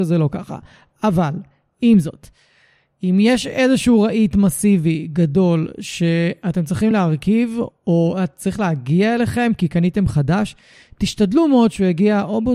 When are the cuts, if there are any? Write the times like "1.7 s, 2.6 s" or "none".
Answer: none